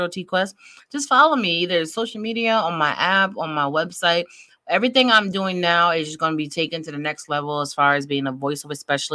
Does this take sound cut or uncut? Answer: uncut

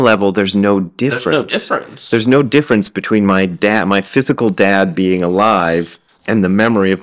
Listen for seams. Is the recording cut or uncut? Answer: uncut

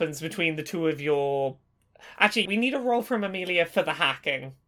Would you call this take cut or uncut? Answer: cut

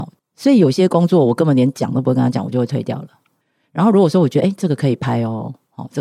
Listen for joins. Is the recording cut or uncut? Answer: uncut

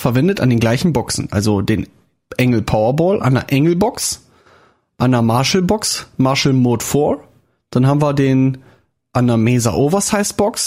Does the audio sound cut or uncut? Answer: uncut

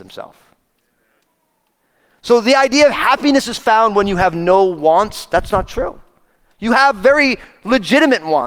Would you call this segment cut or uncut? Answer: uncut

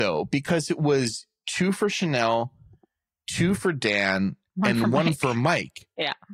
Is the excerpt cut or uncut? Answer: uncut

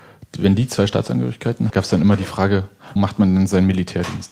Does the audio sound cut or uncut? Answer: cut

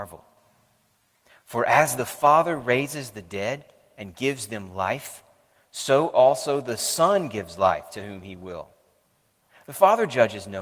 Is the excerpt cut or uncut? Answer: uncut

